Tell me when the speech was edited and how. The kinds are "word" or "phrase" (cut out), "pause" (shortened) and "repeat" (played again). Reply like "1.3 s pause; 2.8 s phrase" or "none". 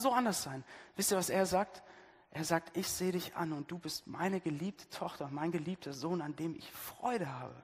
none